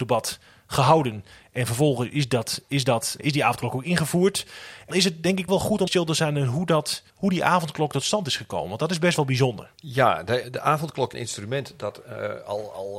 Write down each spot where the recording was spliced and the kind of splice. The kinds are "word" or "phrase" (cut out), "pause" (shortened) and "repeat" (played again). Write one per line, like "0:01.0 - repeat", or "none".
0:03.2 - word
0:04.9 - word
0:05.5 - word
0:05.9 - word
0:07.1 - pause
0:09.7 - pause
0:10.4 - word
0:11.1 - phrase